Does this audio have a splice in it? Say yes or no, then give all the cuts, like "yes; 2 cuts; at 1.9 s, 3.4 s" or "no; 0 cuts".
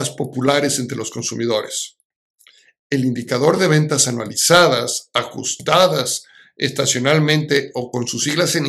no; 0 cuts